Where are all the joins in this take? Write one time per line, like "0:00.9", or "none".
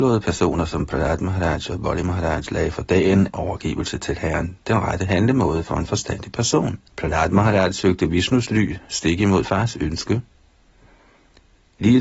0:03.3
0:06.9
0:09.4